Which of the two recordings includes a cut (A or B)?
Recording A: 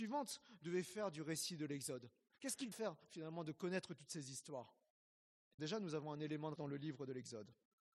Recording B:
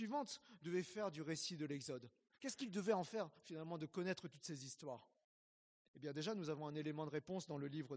A